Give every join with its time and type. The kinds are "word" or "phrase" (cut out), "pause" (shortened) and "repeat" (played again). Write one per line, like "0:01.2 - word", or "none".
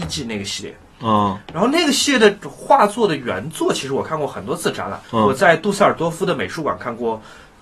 0:05.0 - pause